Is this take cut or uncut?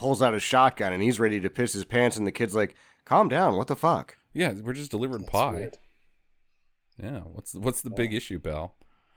uncut